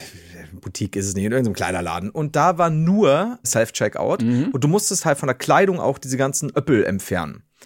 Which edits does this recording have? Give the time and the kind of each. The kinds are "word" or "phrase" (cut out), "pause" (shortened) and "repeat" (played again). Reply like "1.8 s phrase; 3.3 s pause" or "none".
3.4 s word